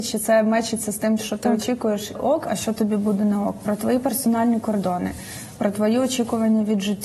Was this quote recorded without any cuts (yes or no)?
no